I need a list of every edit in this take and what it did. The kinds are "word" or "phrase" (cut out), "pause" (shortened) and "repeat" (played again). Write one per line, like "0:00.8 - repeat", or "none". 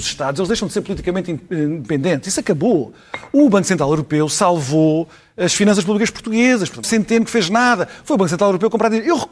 0:06.8 - phrase